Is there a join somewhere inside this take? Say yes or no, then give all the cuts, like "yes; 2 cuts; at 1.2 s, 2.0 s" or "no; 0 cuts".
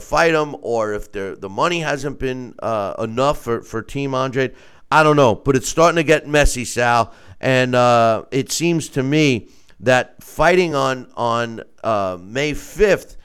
no; 0 cuts